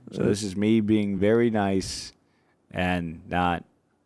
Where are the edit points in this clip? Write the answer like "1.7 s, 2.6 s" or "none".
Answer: none